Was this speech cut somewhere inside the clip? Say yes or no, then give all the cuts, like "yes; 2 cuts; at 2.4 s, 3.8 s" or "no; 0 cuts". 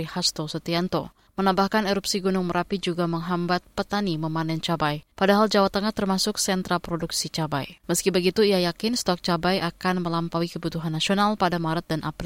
yes; 3 cuts; at 1.3 s, 5.1 s, 7.8 s